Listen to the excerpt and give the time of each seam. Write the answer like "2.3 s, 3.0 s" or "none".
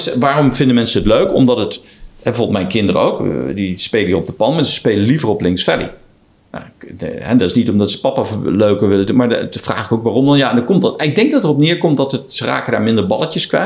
none